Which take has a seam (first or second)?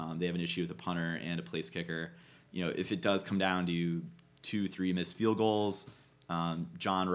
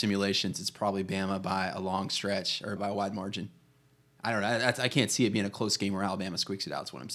second